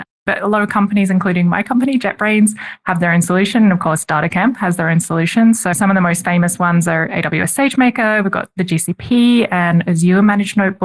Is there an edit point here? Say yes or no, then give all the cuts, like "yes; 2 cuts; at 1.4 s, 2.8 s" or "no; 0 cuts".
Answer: no; 0 cuts